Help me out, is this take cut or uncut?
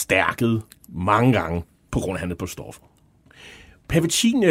uncut